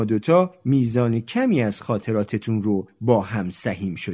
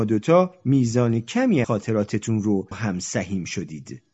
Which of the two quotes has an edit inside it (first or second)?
second